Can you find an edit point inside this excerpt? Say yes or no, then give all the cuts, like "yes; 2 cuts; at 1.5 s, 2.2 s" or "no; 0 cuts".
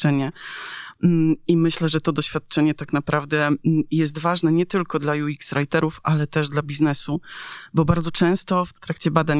no; 0 cuts